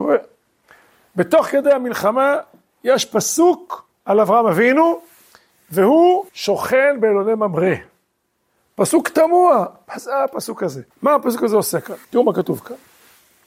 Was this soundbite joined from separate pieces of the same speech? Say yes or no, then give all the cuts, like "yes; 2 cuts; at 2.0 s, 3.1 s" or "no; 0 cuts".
yes; 4 cuts; at 3.9 s, 6.3 s, 10.9 s, 12.0 s